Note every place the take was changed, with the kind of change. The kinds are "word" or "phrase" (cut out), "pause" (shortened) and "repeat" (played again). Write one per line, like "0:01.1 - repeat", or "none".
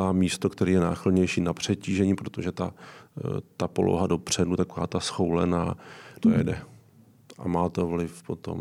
0:06.2 - phrase